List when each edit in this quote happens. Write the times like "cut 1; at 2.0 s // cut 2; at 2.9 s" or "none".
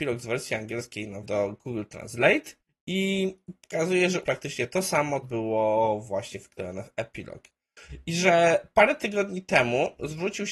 cut 1; at 1.2 s // cut 2; at 2.6 s // cut 3; at 4.2 s // cut 4; at 5.2 s

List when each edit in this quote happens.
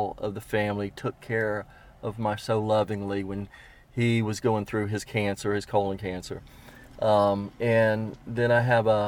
cut 1; at 2.4 s

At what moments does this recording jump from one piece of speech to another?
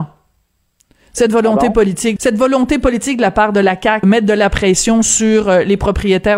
cut 1; at 2.2 s // cut 2; at 4.0 s

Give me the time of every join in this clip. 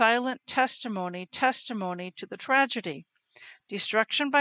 cut 1; at 1.3 s

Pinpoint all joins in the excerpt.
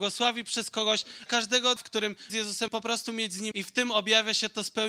cut 1; at 1.3 s // cut 2; at 1.8 s // cut 3; at 2.3 s // cut 4; at 2.7 s // cut 5; at 3.5 s

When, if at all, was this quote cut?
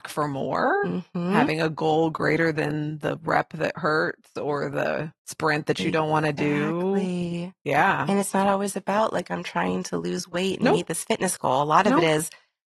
cut 1; at 5.2 s

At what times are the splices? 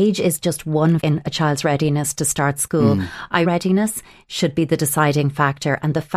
cut 1; at 1.0 s // cut 2; at 3.4 s

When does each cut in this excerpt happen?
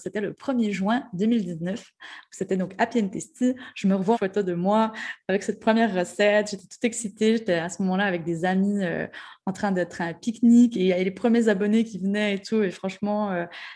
cut 1; at 4.1 s

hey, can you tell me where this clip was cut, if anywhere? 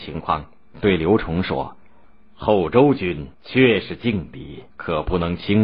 cut 1; at 1.9 s // cut 2; at 3.3 s // cut 3; at 4.7 s

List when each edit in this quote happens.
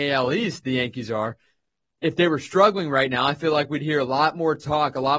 none

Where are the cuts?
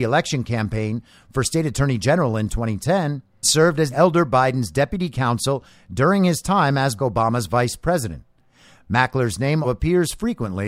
cut 1; at 3.4 s // cut 2; at 3.9 s // cut 3; at 7.0 s // cut 4; at 9.6 s

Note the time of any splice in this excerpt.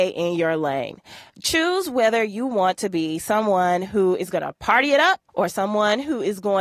cut 1; at 1.3 s // cut 2; at 5.3 s

